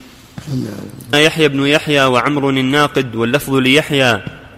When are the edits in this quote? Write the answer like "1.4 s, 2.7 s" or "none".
1.1 s